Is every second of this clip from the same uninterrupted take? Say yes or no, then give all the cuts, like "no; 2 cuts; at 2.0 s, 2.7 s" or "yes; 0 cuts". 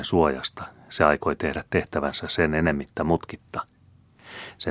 yes; 0 cuts